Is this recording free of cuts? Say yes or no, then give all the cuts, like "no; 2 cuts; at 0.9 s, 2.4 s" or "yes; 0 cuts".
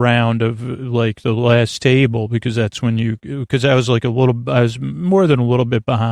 yes; 0 cuts